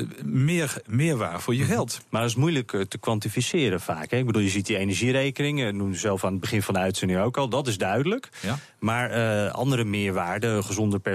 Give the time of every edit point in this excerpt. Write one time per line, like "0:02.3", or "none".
none